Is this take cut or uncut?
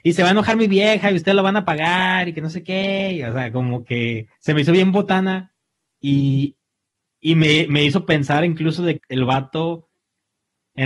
cut